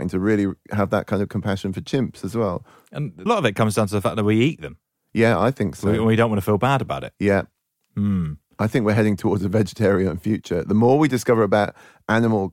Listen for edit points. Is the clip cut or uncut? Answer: cut